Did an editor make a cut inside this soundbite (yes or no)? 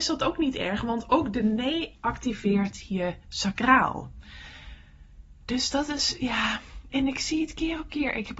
yes